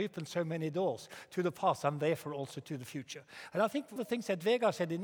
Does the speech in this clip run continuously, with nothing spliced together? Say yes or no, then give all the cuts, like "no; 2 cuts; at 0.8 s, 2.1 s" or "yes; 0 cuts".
no; 1 cut; at 4.0 s